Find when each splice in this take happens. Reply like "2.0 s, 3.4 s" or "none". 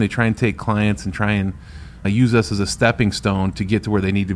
2.0 s